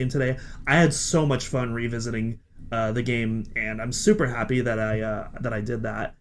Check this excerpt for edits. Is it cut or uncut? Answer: uncut